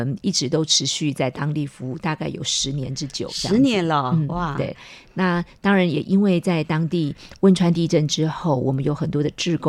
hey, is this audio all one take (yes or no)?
yes